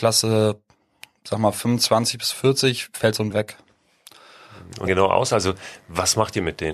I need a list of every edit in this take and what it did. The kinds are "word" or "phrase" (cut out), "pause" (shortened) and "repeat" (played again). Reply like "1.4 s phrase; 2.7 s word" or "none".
3.3 s word; 4.9 s phrase

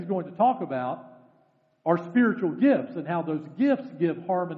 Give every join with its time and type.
none

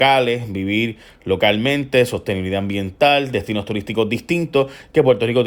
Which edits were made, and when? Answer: none

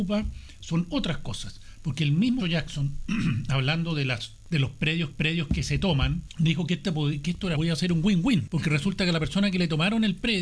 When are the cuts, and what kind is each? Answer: 2.4 s word; 5.1 s repeat; 7.6 s word

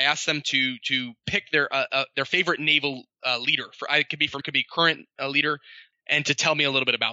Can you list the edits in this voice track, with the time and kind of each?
4.4 s phrase

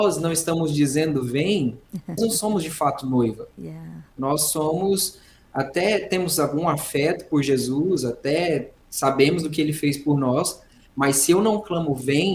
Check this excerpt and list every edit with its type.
2.2 s word

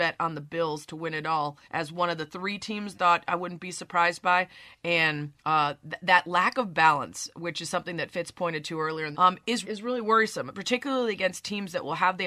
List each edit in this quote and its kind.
1.6 s pause; 2.9 s phrase; 5.4 s pause; 9.1 s phrase; 9.6 s word

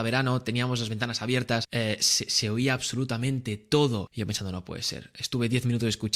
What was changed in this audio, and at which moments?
none

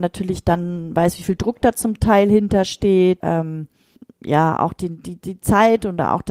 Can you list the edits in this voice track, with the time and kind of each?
3.2 s word; 4.0 s pause

